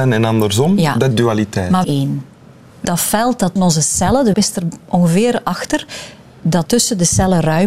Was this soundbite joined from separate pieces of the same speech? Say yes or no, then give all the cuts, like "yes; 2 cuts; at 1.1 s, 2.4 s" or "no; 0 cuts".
yes; 6 cuts; at 1.1 s, 1.8 s, 2.8 s, 3.6 s, 4.3 s, 6.7 s